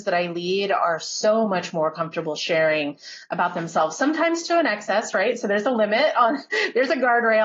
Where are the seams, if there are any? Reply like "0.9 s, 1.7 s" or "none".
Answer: none